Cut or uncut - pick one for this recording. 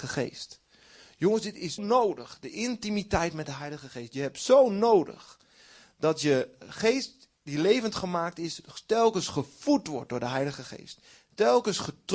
cut